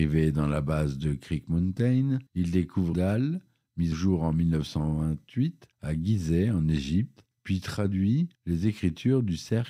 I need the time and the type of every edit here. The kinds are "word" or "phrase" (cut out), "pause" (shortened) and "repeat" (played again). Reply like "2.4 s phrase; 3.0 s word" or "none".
2.3 s pause; 2.9 s word; 3.9 s word; 5.7 s pause; 7.3 s pause; 8.3 s pause